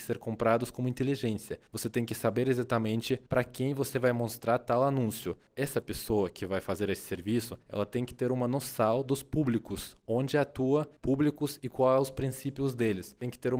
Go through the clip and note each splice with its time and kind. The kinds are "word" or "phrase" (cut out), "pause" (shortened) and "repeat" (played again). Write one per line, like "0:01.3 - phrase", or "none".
0:01.7 - pause
0:03.3 - pause
0:07.6 - pause
0:11.0 - pause